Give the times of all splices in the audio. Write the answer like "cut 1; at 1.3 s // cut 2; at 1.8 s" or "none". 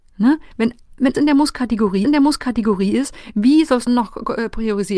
cut 1; at 1.1 s // cut 2; at 2.0 s // cut 3; at 3.9 s